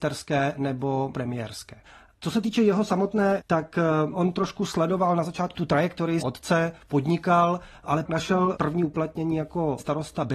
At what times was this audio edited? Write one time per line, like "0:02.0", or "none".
0:03.4
0:05.5
0:06.2
0:08.1